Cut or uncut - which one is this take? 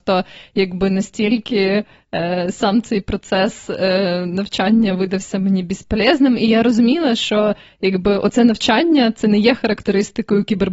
uncut